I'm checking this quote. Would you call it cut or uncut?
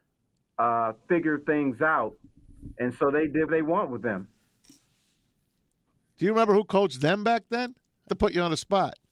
cut